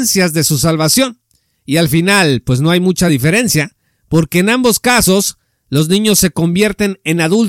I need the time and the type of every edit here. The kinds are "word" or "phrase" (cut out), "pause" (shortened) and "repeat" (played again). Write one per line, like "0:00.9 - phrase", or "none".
none